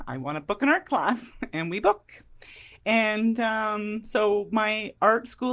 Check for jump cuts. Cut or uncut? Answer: uncut